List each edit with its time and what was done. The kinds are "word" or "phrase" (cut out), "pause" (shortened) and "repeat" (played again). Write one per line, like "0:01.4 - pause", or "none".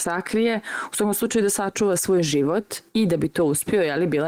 0:02.9 - pause